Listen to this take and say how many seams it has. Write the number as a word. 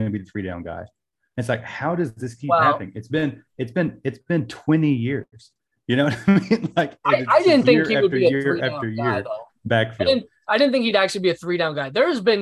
zero